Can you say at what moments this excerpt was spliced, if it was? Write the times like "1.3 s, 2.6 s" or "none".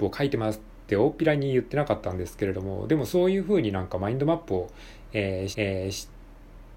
5.5 s